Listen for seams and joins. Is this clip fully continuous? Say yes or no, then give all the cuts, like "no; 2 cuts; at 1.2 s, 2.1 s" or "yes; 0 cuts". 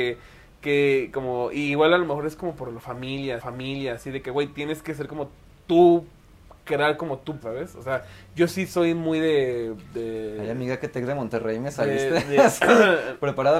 no; 3 cuts; at 3.4 s, 6.6 s, 7.4 s